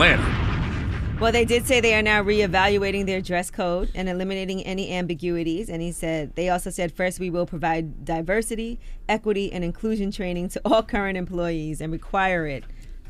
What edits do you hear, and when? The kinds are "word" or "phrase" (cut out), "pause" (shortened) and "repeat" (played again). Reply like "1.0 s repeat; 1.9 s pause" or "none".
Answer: none